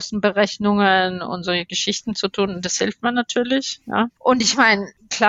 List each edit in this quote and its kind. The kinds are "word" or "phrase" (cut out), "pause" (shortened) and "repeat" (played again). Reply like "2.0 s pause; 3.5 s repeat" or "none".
none